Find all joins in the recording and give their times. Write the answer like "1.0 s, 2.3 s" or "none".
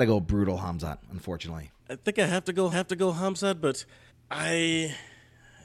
1.8 s, 2.7 s, 4.1 s